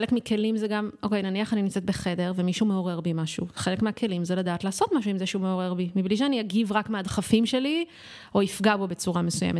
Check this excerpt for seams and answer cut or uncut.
uncut